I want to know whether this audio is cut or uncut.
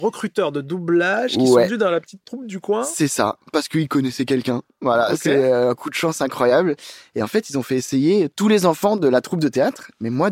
uncut